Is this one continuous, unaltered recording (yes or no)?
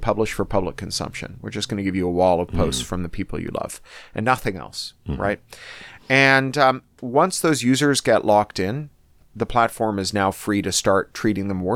yes